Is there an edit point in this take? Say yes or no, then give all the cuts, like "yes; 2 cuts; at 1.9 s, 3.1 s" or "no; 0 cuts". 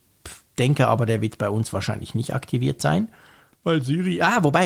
no; 0 cuts